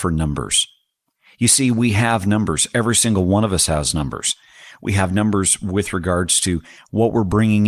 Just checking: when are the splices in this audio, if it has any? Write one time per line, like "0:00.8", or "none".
none